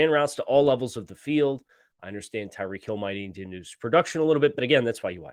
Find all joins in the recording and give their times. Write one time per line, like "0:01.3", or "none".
none